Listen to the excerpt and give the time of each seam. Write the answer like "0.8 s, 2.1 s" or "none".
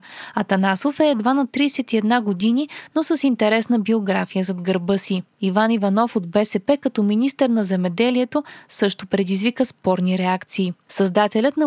none